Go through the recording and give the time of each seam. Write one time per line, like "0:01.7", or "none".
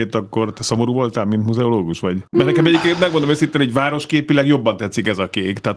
0:02.3